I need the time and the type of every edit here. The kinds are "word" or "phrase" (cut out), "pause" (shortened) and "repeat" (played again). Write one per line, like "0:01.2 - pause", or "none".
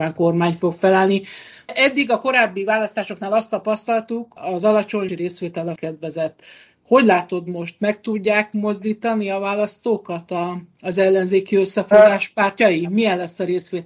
0:04.4 - word
0:05.1 - word
0:05.8 - word